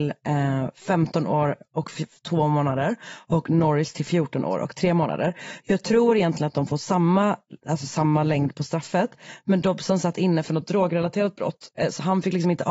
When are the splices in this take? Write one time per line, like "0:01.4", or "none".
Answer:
none